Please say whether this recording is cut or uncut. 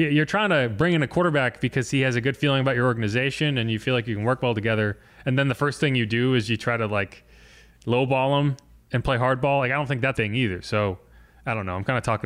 cut